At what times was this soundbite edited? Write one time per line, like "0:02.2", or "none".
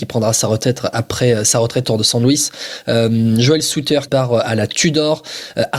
0:01.8
0:04.1